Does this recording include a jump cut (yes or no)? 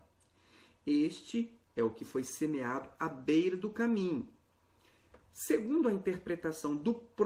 yes